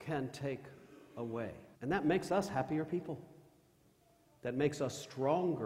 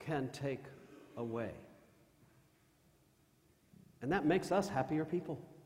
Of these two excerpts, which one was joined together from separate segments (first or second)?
first